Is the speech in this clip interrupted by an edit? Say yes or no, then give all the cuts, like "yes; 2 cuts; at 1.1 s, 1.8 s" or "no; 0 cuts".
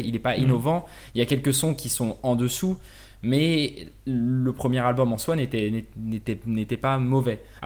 no; 0 cuts